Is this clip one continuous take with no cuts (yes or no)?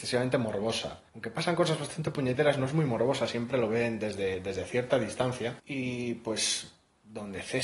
no